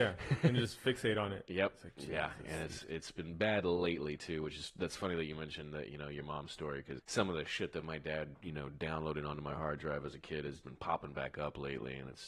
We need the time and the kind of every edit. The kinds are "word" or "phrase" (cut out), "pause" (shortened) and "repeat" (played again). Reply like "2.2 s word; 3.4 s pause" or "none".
7.0 s word; 8.3 s pause; 10.6 s word